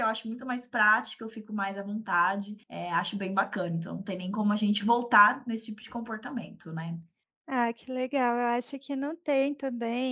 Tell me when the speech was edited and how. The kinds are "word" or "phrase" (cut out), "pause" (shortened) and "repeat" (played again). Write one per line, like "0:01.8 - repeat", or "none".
0:02.6 - pause
0:07.2 - pause